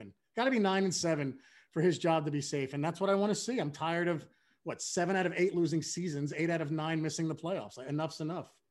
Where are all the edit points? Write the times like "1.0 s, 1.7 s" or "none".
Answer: none